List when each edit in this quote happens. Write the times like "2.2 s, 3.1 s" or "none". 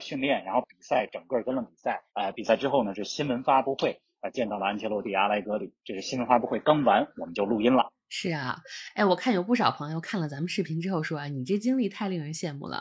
2.1 s